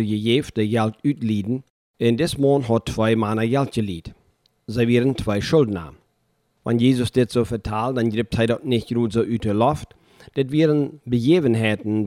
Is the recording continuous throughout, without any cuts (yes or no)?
yes